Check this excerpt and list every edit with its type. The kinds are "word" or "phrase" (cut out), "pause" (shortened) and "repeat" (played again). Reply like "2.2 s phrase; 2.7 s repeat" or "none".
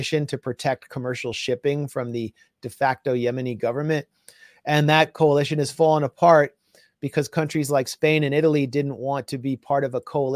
none